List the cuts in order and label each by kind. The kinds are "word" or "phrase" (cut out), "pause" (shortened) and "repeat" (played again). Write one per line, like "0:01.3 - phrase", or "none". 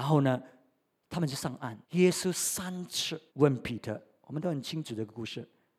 0:01.8 - pause
0:03.3 - pause